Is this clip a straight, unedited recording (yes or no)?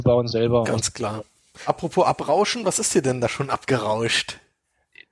yes